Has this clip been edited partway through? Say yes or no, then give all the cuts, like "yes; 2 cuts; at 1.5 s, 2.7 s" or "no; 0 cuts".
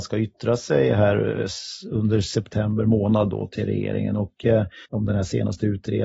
yes; 1 cut; at 4.8 s